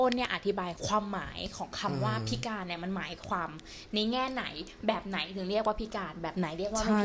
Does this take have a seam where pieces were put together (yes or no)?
no